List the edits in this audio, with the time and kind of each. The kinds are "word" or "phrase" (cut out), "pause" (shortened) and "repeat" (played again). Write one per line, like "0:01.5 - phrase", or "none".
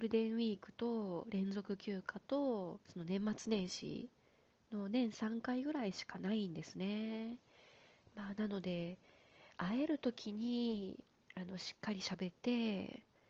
0:02.8 - pause